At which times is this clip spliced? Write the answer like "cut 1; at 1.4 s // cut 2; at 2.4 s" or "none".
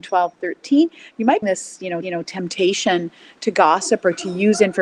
cut 1; at 1.4 s // cut 2; at 2.0 s